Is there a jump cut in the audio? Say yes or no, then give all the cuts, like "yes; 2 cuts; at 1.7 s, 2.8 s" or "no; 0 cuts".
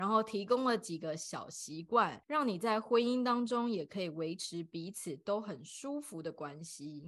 yes; 1 cut; at 2.2 s